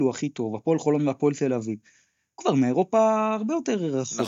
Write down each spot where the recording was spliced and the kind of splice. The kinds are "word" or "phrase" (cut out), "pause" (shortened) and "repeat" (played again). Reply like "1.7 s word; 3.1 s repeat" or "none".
2.4 s word